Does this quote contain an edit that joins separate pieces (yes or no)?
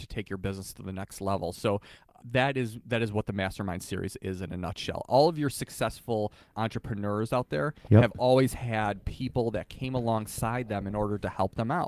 no